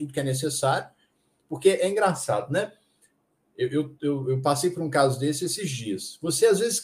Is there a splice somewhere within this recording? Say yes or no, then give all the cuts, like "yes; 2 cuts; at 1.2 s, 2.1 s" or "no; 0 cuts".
no; 0 cuts